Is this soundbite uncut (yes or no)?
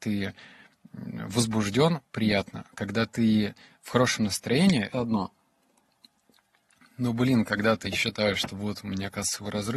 no